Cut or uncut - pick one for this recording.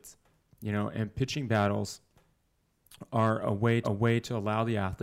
cut